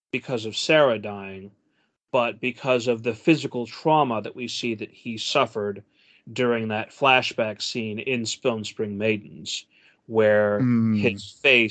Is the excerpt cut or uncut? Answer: uncut